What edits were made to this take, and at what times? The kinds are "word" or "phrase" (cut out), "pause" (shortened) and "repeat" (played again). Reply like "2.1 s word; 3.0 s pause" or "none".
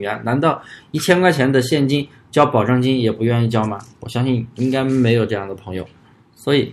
3.9 s pause